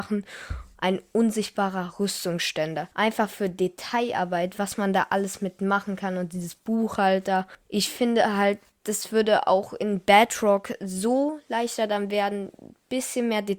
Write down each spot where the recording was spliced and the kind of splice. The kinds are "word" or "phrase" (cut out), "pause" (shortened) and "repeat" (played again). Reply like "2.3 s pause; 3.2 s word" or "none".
2.9 s pause